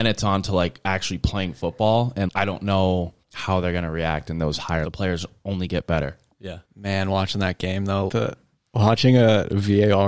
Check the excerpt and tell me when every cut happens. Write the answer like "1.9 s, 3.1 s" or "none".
2.3 s, 3.2 s, 4.8 s, 6.7 s, 8.1 s